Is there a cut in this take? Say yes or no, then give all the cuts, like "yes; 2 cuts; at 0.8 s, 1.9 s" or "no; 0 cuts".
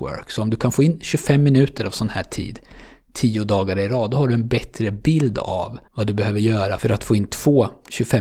yes; 1 cut; at 5.9 s